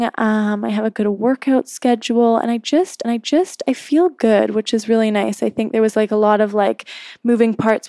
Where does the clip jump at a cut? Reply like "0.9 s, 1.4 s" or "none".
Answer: 3.0 s